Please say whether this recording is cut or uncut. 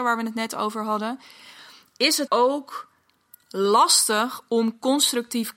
cut